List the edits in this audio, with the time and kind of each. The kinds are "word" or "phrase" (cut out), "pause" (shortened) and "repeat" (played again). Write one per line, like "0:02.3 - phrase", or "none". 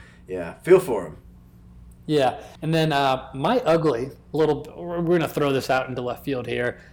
0:02.6 - pause